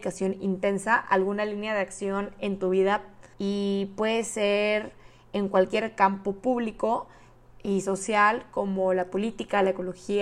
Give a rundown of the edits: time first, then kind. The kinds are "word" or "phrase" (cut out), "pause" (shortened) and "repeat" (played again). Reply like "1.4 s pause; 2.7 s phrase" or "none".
3.3 s pause